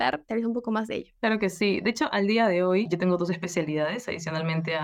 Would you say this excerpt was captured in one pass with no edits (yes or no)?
no